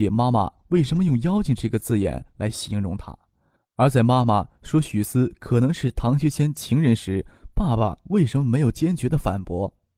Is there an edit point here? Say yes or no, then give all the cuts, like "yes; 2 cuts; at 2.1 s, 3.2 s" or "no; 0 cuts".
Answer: no; 0 cuts